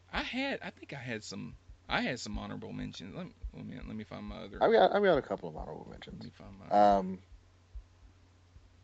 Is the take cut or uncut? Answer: cut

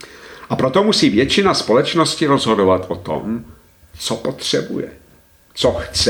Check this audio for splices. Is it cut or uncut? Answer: uncut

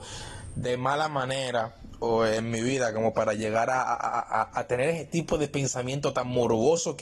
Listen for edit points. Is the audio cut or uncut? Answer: uncut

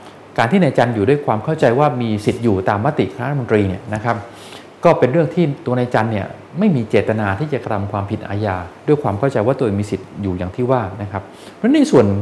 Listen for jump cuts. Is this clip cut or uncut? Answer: cut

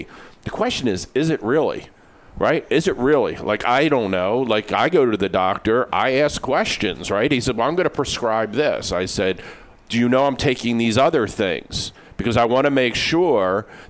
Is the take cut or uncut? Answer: uncut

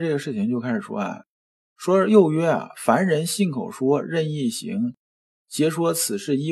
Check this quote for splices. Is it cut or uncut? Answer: uncut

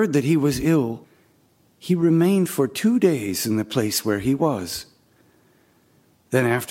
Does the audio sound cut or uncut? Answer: uncut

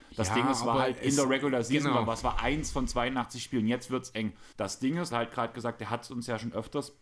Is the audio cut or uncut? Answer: cut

